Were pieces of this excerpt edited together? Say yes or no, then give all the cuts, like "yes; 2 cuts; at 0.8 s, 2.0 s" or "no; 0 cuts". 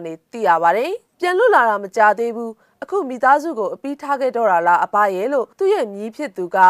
yes; 2 cuts; at 1.1 s, 5.5 s